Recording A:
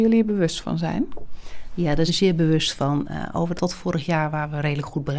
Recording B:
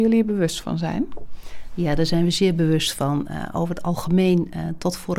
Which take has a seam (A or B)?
A